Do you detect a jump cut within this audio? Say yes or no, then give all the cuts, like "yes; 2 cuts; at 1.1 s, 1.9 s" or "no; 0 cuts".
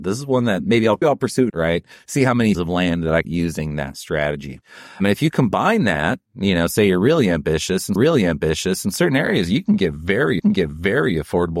yes; 8 cuts; at 1.0 s, 1.5 s, 1.9 s, 2.5 s, 3.2 s, 6.3 s, 8.0 s, 10.4 s